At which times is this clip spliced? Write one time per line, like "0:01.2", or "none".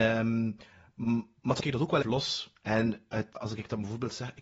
0:01.6
0:02.0
0:03.4